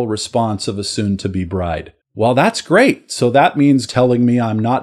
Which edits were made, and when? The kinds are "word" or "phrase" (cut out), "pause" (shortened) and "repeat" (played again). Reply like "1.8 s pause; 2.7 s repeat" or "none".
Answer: 2.0 s pause; 3.9 s word